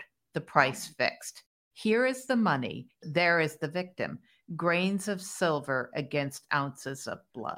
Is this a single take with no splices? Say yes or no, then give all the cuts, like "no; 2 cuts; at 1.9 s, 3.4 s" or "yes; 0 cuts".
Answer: yes; 0 cuts